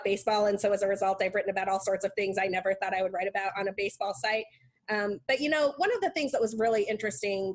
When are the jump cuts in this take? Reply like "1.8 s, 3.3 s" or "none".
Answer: none